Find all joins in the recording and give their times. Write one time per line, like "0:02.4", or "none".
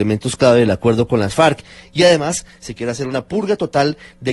none